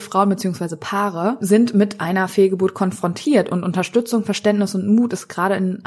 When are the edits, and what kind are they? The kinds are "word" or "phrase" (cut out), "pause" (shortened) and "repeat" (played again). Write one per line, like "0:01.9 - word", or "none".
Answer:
none